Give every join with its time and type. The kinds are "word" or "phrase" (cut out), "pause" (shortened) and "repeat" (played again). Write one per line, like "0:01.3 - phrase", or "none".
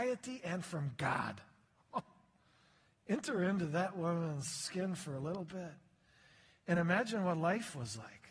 none